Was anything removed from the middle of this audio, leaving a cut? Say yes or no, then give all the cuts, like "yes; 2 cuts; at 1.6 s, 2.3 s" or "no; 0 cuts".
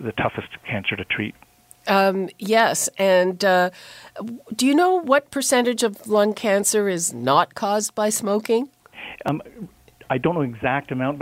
no; 0 cuts